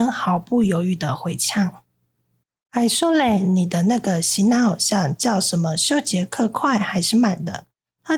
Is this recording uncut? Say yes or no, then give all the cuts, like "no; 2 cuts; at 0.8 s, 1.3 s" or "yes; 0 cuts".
no; 1 cut; at 1.9 s